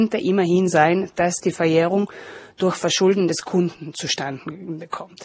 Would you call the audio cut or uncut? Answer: uncut